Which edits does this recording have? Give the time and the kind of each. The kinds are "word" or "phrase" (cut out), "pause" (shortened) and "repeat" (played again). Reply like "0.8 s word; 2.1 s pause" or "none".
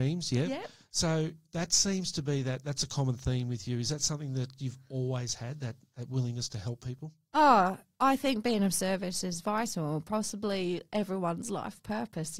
1.4 s pause